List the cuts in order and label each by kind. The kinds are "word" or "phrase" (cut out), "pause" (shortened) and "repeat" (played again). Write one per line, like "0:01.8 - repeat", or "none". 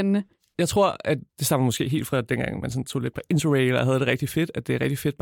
0:01.3 - pause